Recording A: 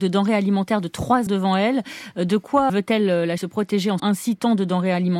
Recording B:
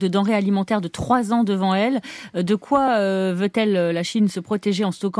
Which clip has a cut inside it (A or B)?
A